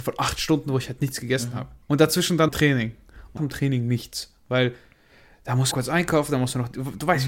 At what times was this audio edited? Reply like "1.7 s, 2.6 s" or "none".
1.8 s, 2.5 s, 3.4 s, 5.7 s